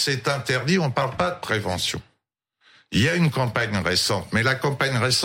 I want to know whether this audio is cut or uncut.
uncut